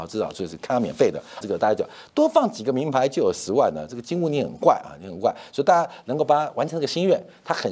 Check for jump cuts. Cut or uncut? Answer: cut